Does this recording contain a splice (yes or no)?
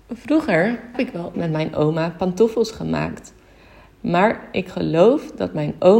yes